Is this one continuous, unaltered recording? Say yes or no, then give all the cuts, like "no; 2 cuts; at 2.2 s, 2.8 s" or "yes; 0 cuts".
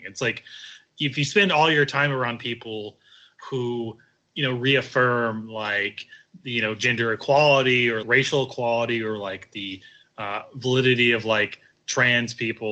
no; 1 cut; at 8.0 s